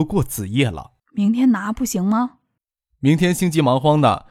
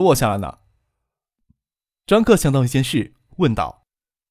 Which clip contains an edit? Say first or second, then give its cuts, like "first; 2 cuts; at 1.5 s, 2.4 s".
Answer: first; 2 cuts; at 1.0 s, 2.6 s